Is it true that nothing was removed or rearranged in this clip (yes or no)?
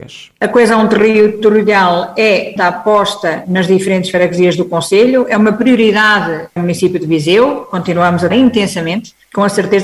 no